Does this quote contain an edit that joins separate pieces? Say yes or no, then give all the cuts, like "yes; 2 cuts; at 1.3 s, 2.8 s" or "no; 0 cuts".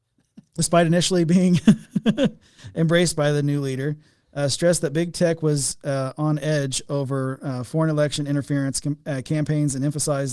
no; 0 cuts